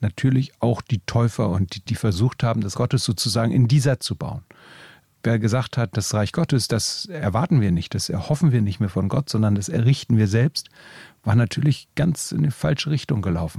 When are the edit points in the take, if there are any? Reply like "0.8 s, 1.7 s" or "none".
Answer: 1.9 s, 2.7 s, 4.0 s